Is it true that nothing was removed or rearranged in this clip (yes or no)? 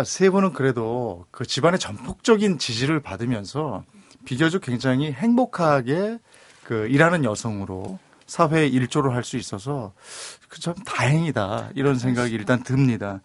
yes